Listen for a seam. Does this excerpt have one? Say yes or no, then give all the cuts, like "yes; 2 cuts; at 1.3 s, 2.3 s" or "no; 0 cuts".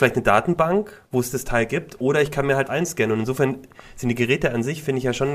yes; 2 cuts; at 1.1 s, 2.7 s